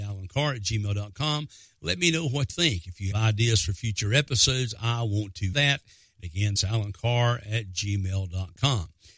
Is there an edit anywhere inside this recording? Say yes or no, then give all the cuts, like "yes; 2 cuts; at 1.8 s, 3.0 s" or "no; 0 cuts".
yes; 4 cuts; at 2.5 s, 3.1 s, 5.5 s, 6.6 s